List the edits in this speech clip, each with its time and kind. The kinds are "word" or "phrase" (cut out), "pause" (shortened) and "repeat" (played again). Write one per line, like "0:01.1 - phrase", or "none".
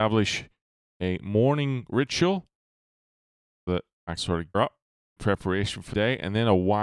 0:03.7 - word
0:04.2 - word
0:04.5 - word
0:05.2 - word
0:05.9 - word